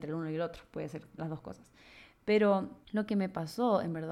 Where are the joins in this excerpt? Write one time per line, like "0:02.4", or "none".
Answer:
0:01.2
0:02.8